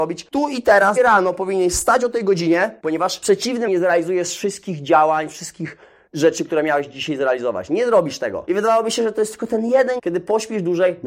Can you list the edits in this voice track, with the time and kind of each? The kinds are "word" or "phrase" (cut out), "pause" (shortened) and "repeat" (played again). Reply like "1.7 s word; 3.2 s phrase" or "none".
1.0 s word; 3.7 s word; 10.0 s word